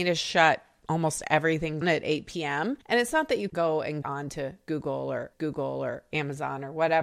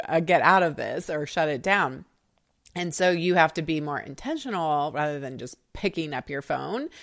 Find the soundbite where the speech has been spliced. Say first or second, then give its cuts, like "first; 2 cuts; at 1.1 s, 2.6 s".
first; 5 cuts; at 1.8 s, 2.8 s, 3.5 s, 4.0 s, 5.3 s